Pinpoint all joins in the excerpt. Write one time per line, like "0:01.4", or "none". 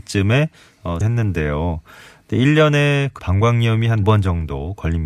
0:01.0
0:03.2
0:04.0